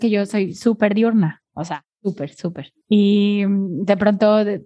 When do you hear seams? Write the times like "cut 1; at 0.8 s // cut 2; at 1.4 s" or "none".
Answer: cut 1; at 2.8 s